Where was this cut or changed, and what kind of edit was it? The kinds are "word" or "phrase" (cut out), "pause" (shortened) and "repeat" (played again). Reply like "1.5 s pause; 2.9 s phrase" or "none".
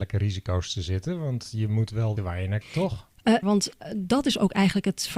2.2 s word; 2.6 s word; 3.4 s word